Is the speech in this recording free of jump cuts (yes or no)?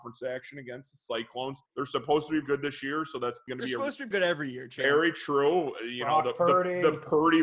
no